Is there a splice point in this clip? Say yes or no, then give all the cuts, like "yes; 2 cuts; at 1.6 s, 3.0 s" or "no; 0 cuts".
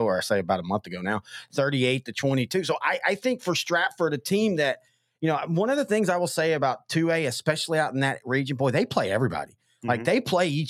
no; 0 cuts